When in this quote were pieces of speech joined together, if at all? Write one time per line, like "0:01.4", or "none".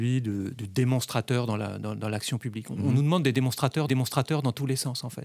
0:03.9